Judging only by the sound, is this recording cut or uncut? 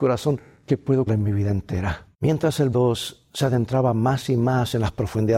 cut